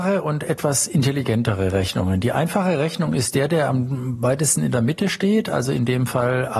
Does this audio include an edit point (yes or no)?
no